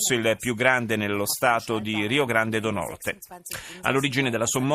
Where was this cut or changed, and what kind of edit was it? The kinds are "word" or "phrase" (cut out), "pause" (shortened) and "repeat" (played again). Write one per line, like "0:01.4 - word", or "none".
none